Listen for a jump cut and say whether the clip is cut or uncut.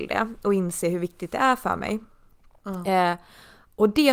uncut